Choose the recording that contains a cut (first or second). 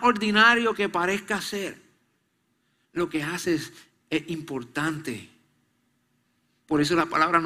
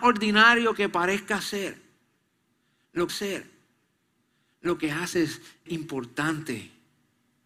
second